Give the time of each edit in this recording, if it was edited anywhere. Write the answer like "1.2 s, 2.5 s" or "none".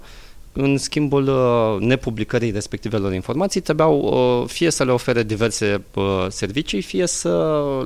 none